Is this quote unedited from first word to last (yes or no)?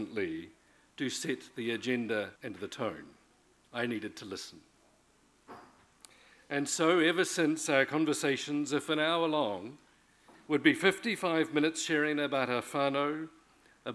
no